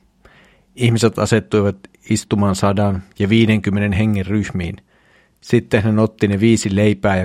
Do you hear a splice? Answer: no; 0 cuts

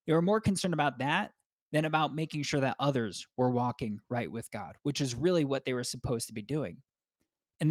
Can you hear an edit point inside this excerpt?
no; 0 cuts

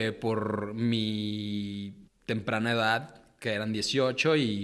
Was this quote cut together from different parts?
yes; 1 cut; at 2.1 s

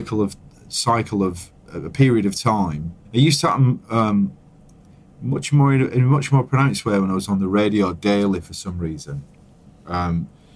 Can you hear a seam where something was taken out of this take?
yes; 1 cut; at 3.0 s

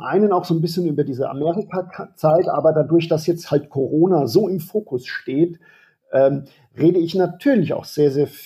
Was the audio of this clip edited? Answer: no; 0 cuts

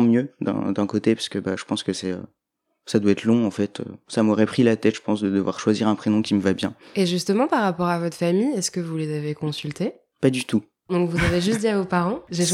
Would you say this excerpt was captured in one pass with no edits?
yes; 0 cuts

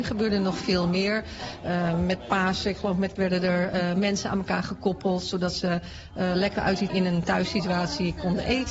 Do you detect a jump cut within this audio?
yes; 3 cuts; at 3.2 s, 6.6 s, 6.9 s

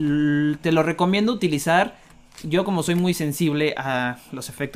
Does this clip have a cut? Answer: no; 0 cuts

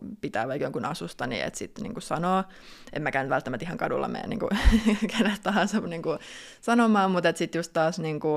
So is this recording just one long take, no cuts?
yes; 0 cuts

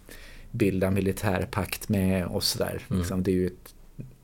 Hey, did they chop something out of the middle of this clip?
yes; 1 cut; at 2.3 s

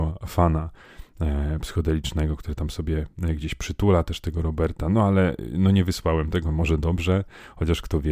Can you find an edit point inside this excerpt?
no; 0 cuts

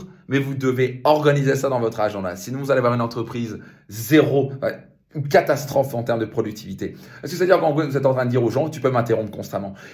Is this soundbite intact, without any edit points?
yes; 0 cuts

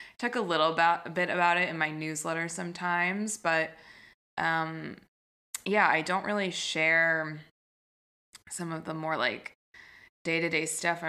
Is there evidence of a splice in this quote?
no; 0 cuts

